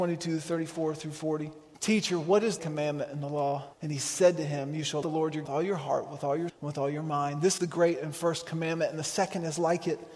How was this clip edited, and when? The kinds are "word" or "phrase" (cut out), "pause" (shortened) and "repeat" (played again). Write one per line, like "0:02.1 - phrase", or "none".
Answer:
0:01.7 - pause
0:02.6 - phrase
0:03.7 - pause
0:05.0 - word
0:05.4 - phrase
0:06.5 - word
0:07.6 - word